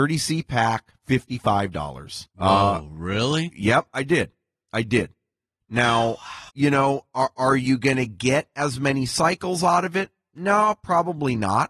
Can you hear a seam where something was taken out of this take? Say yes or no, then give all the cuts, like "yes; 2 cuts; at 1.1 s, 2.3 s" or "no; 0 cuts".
yes; 2 cuts; at 2.3 s, 6.5 s